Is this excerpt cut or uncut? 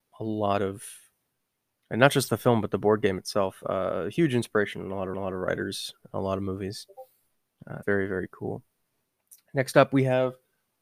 cut